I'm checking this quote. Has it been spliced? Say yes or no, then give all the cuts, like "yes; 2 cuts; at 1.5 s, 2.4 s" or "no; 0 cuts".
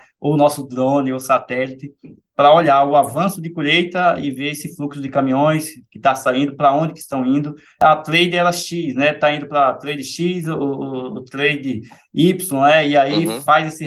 no; 0 cuts